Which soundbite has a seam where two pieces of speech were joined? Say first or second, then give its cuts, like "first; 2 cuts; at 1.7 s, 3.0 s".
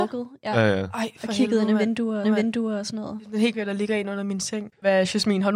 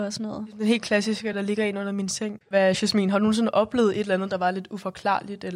first; 2 cuts; at 2.2 s, 3.5 s